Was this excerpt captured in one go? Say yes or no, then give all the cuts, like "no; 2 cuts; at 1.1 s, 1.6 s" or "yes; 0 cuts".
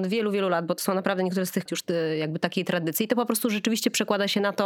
no; 1 cut; at 1.7 s